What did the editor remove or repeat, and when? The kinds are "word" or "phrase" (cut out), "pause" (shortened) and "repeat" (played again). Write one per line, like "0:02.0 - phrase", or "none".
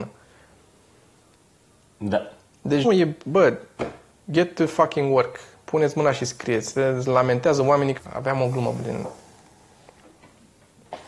0:02.8 - word
0:08.0 - word
0:08.8 - word